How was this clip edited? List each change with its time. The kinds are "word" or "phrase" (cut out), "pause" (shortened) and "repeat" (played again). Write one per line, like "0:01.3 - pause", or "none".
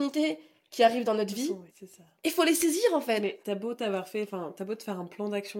0:01.7 - pause